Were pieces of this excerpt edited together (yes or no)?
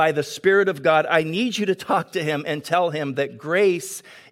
no